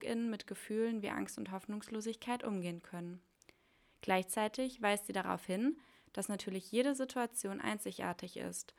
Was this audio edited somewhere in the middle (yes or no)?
no